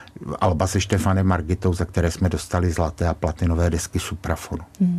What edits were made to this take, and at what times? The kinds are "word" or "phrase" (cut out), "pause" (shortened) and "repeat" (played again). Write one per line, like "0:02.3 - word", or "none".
none